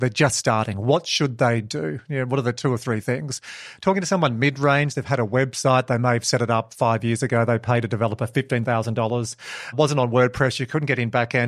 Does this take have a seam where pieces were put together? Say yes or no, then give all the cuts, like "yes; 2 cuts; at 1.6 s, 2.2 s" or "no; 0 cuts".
no; 0 cuts